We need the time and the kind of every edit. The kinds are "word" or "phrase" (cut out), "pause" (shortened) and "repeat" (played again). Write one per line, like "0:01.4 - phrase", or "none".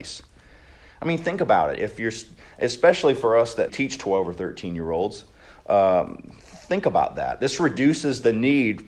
0:03.7 - word